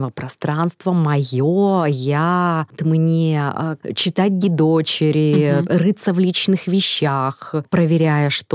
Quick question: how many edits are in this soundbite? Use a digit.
2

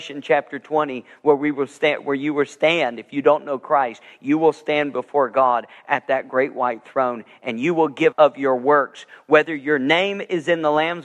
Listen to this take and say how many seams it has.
1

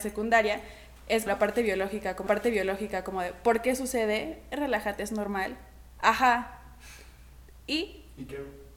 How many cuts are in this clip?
2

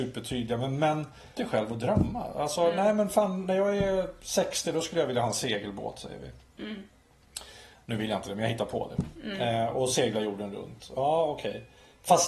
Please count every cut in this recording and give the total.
1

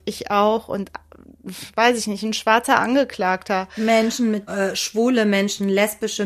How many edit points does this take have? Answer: 1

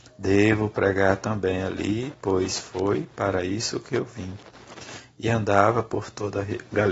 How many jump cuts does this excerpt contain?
0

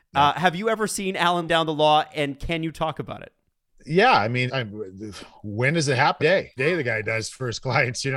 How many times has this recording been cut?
4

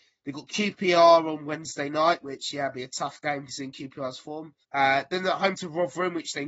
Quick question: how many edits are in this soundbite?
1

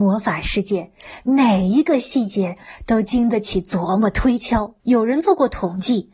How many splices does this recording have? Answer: 1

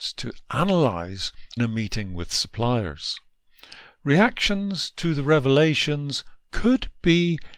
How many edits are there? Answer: 1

